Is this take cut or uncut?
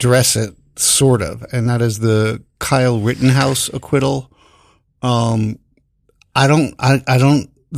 uncut